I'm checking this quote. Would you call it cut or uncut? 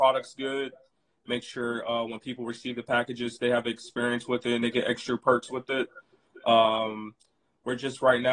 uncut